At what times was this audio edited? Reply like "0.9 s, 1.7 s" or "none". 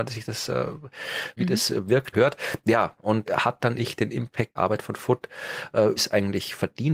1.4 s, 2.1 s, 3.3 s, 3.8 s, 4.5 s, 6.0 s